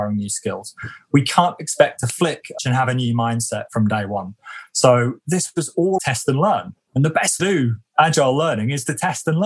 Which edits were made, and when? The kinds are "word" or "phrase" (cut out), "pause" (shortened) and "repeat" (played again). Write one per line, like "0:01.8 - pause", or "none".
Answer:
0:02.6 - phrase
0:06.0 - word
0:07.4 - phrase